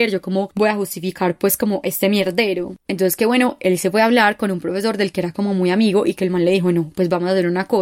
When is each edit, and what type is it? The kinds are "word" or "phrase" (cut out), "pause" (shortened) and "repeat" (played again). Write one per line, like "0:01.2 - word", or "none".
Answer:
none